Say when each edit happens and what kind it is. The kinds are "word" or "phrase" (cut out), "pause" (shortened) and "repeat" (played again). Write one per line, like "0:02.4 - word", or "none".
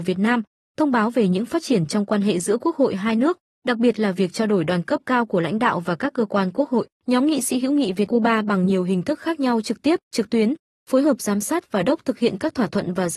0:06.9 - pause
0:08.1 - word
0:10.0 - pause
0:11.9 - word